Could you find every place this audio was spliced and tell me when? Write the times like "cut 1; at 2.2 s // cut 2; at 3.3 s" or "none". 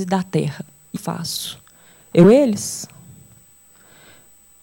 cut 1; at 1.0 s // cut 2; at 2.2 s